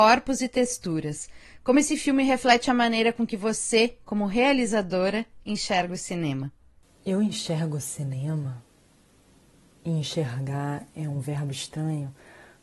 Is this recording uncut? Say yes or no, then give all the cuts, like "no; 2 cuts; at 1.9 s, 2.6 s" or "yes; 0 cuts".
yes; 0 cuts